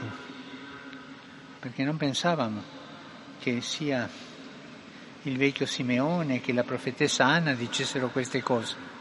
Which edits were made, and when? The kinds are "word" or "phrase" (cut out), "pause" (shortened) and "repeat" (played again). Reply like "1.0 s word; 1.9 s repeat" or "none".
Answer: 1.6 s pause